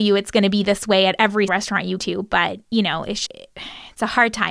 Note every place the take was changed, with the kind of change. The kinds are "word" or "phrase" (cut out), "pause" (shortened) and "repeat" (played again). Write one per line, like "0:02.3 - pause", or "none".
0:01.5 - word
0:02.0 - word
0:02.6 - pause
0:03.3 - word